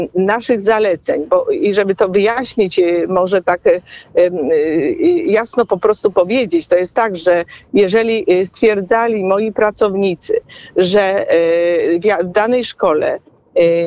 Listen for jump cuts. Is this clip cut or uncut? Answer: uncut